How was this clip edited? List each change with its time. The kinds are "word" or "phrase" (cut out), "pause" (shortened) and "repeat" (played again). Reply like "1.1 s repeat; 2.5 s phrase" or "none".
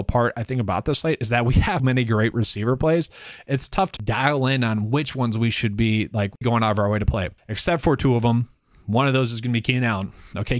1.8 s word; 4.0 s word; 6.4 s word